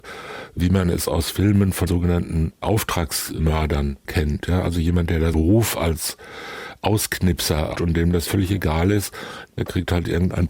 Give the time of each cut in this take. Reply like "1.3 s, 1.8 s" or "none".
1.9 s, 5.3 s, 7.7 s, 8.3 s

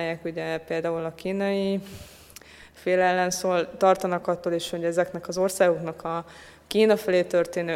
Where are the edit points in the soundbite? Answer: none

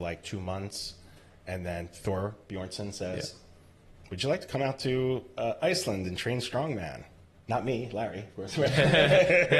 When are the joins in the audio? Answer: none

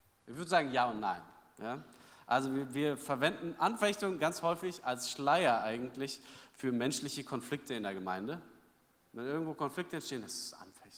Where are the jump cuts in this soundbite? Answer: none

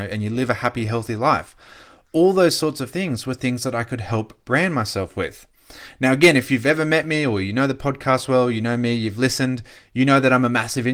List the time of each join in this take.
none

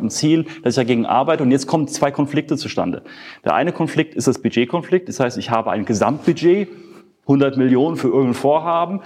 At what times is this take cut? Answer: none

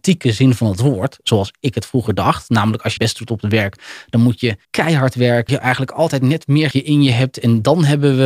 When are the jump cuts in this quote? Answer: 3.0 s, 4.6 s, 5.5 s, 6.7 s

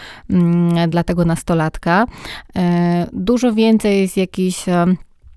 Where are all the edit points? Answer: 0.9 s

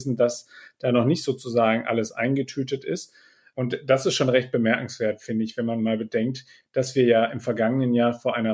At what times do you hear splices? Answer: none

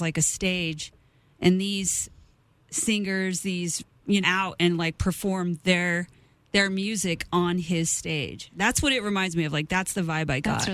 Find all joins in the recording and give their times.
4.2 s

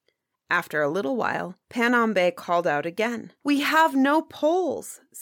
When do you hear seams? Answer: 1.6 s, 3.4 s

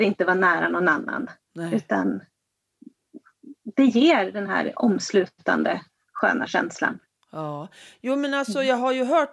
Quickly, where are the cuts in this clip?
none

